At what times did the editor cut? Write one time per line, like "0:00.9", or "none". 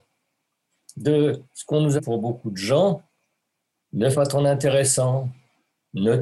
0:02.0
0:04.1